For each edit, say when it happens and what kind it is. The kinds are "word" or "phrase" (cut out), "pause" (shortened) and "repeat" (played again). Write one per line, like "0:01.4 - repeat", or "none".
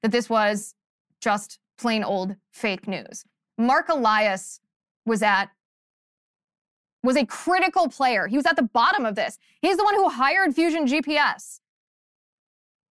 none